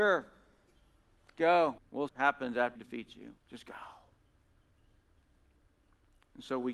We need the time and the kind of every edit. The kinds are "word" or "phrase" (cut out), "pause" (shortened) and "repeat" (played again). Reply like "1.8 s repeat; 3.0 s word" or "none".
1.8 s word; 2.1 s phrase; 2.8 s word; 3.4 s pause